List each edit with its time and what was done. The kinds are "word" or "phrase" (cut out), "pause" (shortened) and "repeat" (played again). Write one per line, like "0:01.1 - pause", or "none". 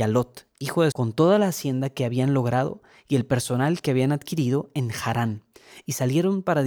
0:00.9 - phrase